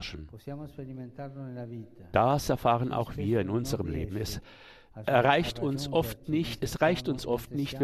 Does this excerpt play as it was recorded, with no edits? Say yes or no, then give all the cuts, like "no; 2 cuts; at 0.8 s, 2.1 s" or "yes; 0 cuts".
yes; 0 cuts